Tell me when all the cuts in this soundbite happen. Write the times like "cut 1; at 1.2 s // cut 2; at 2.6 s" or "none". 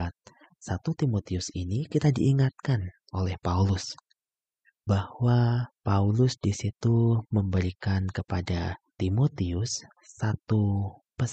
none